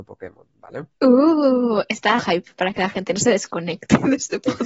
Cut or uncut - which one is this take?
cut